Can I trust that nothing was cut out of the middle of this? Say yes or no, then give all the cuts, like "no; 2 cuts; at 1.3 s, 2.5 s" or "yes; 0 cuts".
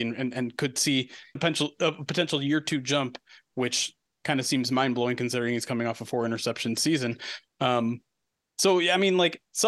no; 1 cut; at 1.4 s